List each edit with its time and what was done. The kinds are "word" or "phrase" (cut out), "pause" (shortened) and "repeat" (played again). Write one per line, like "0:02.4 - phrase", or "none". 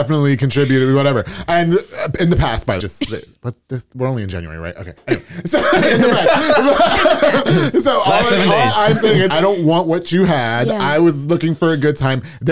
0:02.8 - phrase
0:05.0 - pause
0:09.3 - word